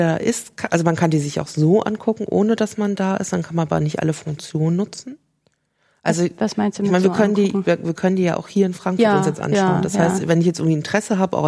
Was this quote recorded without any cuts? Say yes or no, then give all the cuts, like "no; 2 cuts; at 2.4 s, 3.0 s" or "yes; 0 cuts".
yes; 0 cuts